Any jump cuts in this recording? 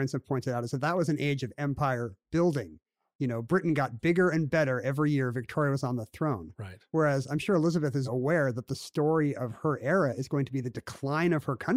yes; 1 cut; at 8.0 s

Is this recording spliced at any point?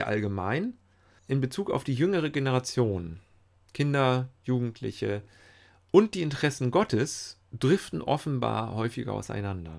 yes; 1 cut; at 7.4 s

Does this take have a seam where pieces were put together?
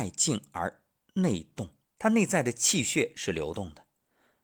yes; 1 cut; at 1.8 s

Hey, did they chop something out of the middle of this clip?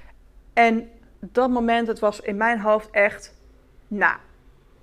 no; 0 cuts

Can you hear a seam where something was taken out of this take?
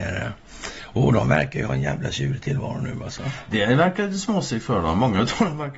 no; 0 cuts

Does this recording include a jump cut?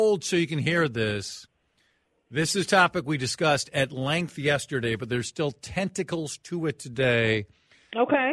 no; 0 cuts

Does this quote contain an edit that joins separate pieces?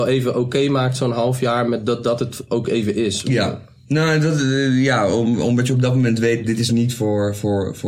no; 0 cuts

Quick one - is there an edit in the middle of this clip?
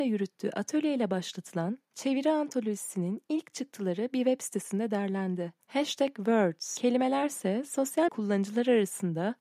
yes; 3 cuts; at 1.8 s, 5.6 s, 8.1 s

